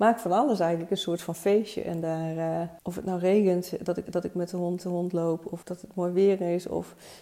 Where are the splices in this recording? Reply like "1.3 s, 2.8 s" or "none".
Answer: 4.1 s, 4.8 s, 5.6 s